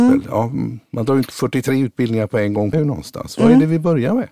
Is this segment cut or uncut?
cut